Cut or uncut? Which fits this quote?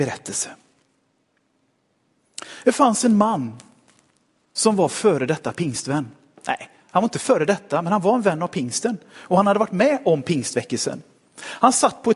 uncut